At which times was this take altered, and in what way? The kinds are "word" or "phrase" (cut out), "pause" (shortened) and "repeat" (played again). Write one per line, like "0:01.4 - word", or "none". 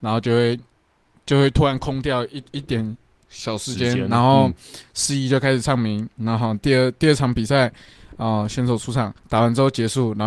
0:09.2 - pause

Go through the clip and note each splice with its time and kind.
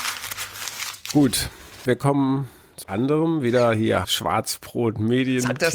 0:02.8 - word
0:04.0 - word

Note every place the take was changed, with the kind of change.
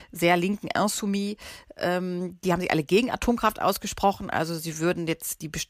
none

